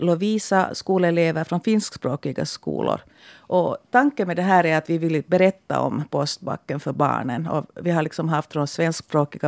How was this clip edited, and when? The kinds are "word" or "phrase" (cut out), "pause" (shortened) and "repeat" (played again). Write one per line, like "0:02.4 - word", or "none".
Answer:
none